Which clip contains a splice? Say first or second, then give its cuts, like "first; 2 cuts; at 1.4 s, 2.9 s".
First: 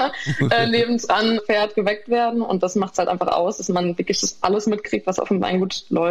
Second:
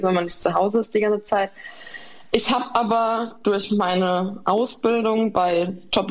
first; 1 cut; at 1.4 s